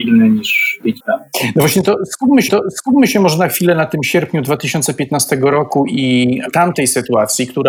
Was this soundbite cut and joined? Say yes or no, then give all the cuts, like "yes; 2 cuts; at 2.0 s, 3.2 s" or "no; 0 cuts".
yes; 3 cuts; at 1.0 s, 2.5 s, 6.5 s